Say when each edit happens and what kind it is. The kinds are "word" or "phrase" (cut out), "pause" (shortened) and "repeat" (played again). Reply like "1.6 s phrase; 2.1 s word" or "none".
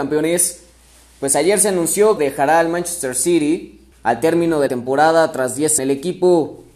2.2 s phrase; 3.9 s pause; 4.7 s word; 5.8 s phrase